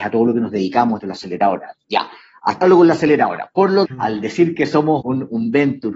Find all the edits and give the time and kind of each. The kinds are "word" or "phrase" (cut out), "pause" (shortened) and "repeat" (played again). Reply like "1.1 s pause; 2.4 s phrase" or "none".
1.0 s word; 2.6 s word; 3.9 s word; 5.0 s word